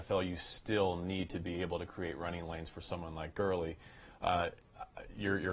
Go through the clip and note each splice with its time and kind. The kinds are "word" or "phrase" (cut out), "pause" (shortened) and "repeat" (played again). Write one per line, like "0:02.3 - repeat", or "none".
none